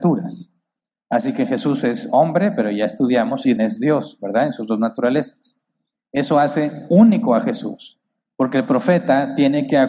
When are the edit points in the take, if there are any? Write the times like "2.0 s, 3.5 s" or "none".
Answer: 3.6 s